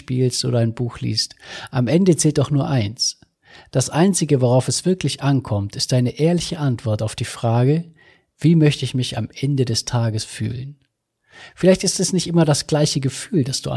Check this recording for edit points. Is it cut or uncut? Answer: uncut